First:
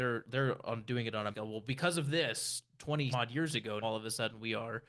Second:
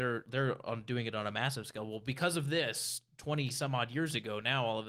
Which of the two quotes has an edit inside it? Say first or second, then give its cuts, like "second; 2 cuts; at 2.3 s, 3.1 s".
first; 3 cuts; at 1.3 s, 3.1 s, 3.8 s